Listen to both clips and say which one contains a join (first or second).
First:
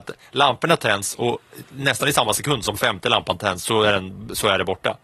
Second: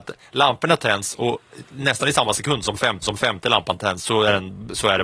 second